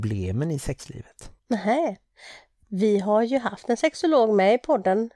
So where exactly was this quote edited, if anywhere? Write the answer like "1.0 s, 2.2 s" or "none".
1.4 s

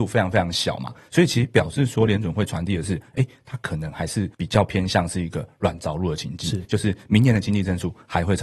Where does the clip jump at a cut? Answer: 4.3 s

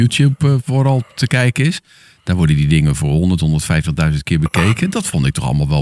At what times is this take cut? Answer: none

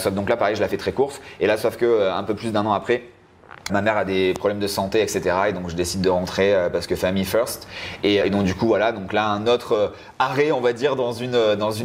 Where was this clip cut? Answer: 3.7 s, 8.2 s

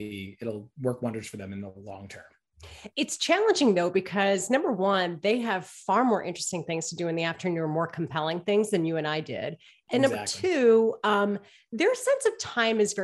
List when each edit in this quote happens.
none

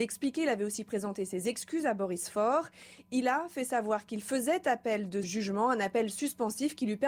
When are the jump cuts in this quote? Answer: 5.2 s

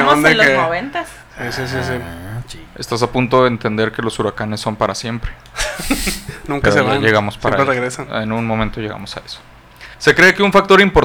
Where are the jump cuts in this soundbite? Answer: 2.7 s, 9.9 s

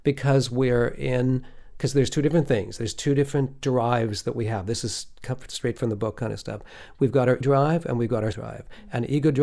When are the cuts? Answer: 7.4 s, 8.3 s

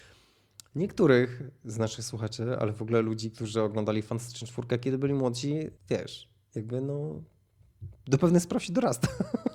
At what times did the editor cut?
5.8 s

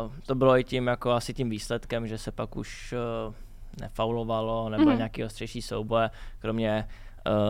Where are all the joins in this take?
none

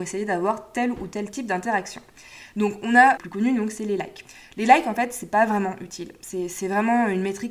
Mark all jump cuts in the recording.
3.2 s

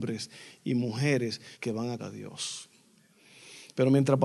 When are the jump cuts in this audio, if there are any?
1.5 s, 2.0 s

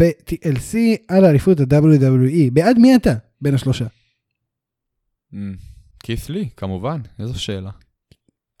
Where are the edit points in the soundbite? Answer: 5.9 s

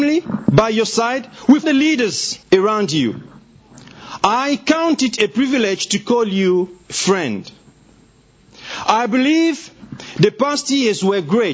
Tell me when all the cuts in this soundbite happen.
1.6 s, 2.4 s, 6.8 s

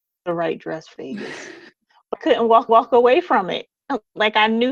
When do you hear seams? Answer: 1.0 s, 2.1 s, 2.7 s

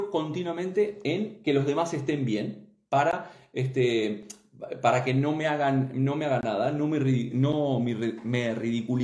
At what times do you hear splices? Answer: none

